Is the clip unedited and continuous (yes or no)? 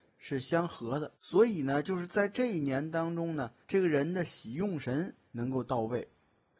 no